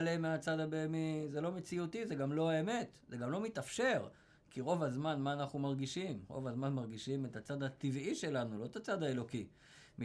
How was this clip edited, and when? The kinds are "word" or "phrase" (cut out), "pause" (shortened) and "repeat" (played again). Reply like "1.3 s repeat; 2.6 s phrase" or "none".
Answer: none